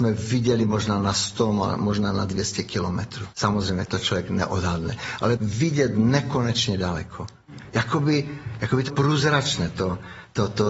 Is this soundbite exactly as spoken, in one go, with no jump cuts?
no; 3 cuts; at 3.3 s, 5.4 s, 8.9 s

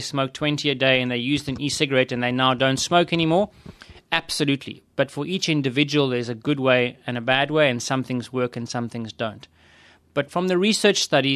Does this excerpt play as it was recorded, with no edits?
yes; 0 cuts

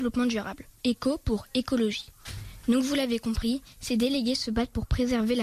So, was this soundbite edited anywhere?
no; 0 cuts

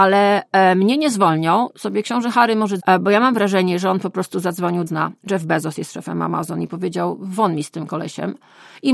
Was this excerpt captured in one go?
no; 2 cuts; at 2.8 s, 4.9 s

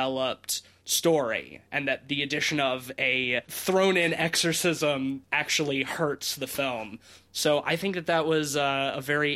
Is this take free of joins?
yes; 0 cuts

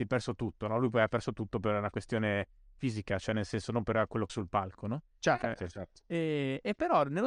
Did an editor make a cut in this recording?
yes; 1 cut; at 4.3 s

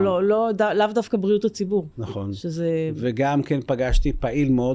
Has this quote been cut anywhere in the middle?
yes; 1 cut; at 1.9 s

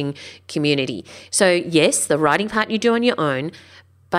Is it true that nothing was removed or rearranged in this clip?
yes; 0 cuts

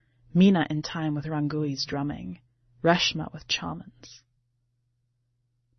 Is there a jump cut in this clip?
no; 0 cuts

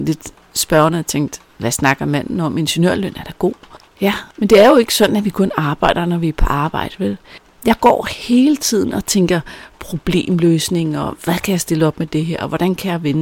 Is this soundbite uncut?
no; 2 cuts; at 1.5 s, 4.3 s

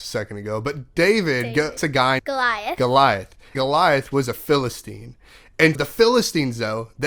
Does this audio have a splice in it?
yes; 4 cuts; at 1.8 s, 2.2 s, 3.5 s, 5.7 s

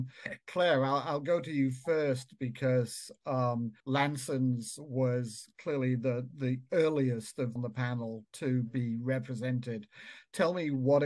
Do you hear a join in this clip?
yes; 2 cuts; at 3.8 s, 7.6 s

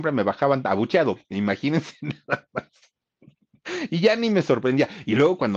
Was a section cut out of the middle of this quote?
no; 0 cuts

